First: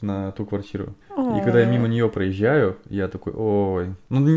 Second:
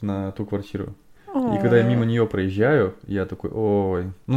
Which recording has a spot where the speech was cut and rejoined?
first; 1 cut; at 1.0 s

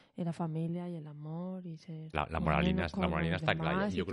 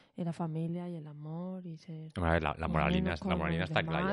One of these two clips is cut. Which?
first; 1 cut; at 2.1 s

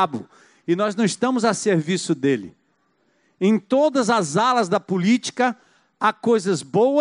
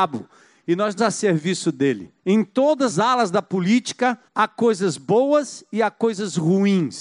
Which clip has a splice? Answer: second; 4 cuts; at 1.0 s, 2.2 s, 2.9 s, 4.3 s

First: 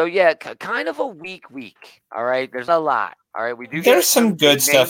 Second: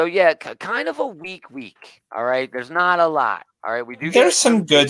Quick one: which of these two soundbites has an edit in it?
first; 1 cut; at 2.7 s

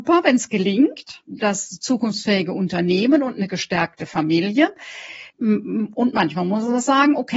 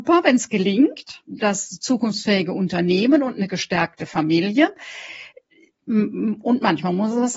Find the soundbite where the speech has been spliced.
first; 1 cut; at 5.3 s

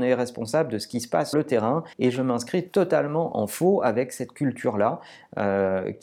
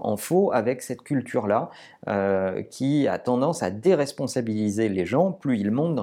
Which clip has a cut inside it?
first; 2 cuts; at 1.3 s, 1.9 s

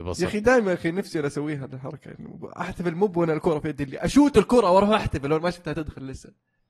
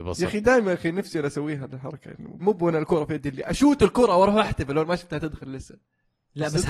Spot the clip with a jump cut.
second; 1 cut; at 2.4 s

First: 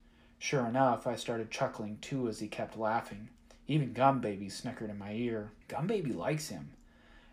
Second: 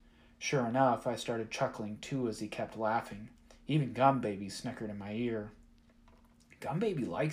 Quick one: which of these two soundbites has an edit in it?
first; 1 cut; at 5.6 s

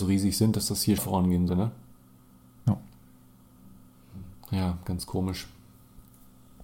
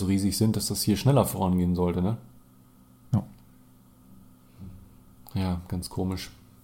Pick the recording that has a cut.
first; 3 cuts; at 1.0 s, 1.5 s, 4.3 s

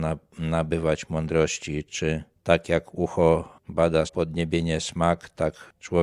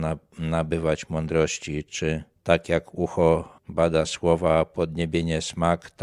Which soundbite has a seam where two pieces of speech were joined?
first; 1 cut; at 4.1 s

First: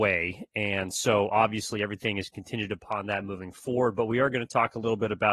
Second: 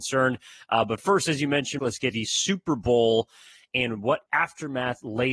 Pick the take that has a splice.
second; 3 cuts; at 1.8 s, 2.1 s, 4.3 s

